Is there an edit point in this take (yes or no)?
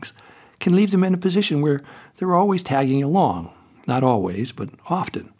no